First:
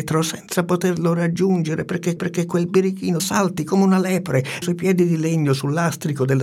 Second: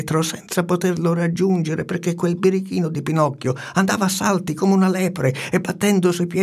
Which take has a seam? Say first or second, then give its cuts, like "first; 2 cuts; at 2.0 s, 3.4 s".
first; 3 cuts; at 2.2 s, 3.2 s, 4.6 s